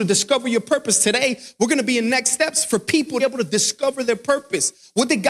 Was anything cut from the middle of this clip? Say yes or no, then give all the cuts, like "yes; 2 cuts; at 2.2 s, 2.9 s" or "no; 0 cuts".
yes; 1 cut; at 3.2 s